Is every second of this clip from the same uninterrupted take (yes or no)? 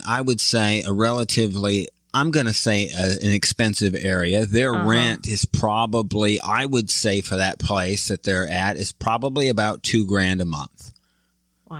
no